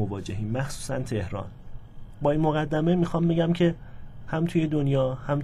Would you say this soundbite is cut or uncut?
uncut